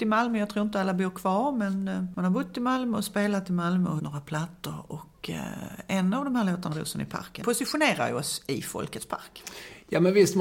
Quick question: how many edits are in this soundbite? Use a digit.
3